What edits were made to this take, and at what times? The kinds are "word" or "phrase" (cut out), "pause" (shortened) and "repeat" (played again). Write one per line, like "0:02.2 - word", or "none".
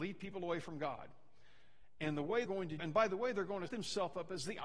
0:02.5 - word
0:02.8 - word
0:03.7 - word